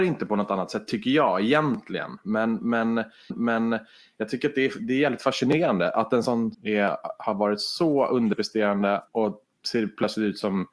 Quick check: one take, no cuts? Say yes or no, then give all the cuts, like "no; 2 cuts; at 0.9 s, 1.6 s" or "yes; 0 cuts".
no; 3 cuts; at 3.3 s, 6.5 s, 9.1 s